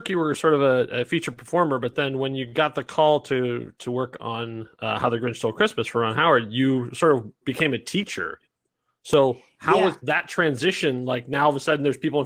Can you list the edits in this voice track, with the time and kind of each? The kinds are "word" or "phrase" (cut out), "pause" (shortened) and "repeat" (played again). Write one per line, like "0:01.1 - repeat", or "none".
none